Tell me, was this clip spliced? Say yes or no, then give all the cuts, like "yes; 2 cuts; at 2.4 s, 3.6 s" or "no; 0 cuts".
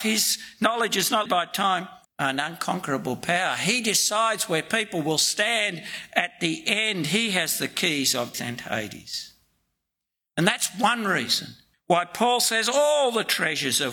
yes; 4 cuts; at 1.3 s, 2.0 s, 8.3 s, 11.7 s